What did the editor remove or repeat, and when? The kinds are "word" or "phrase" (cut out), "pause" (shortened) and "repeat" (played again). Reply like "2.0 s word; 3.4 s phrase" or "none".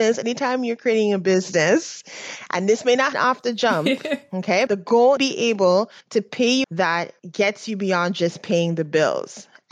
3.1 s word; 4.7 s word; 5.2 s phrase; 6.0 s pause; 6.6 s phrase; 7.2 s pause